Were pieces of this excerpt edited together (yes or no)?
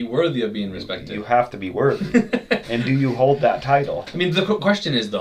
no